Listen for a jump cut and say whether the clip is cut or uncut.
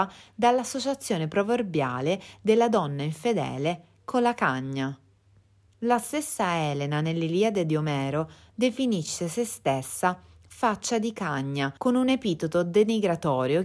cut